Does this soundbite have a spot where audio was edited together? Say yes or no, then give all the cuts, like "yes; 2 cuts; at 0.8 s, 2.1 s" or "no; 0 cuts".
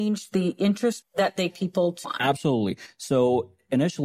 yes; 3 cuts; at 1.0 s, 1.5 s, 2.0 s